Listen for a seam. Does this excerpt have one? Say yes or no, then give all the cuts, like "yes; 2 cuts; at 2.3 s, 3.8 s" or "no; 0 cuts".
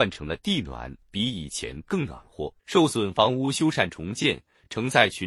yes; 2 cuts; at 1.0 s, 2.6 s